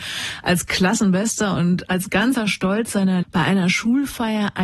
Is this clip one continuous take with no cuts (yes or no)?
no